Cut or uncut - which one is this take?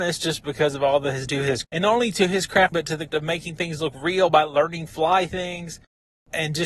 cut